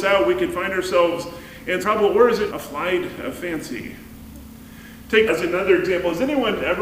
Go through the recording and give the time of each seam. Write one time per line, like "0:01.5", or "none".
0:01.8
0:02.5
0:05.3